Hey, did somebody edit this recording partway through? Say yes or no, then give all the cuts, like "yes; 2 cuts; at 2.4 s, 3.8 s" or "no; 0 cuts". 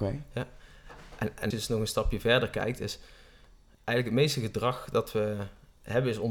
yes; 2 cuts; at 1.5 s, 3.7 s